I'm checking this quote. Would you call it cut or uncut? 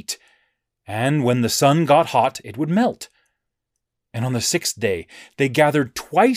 uncut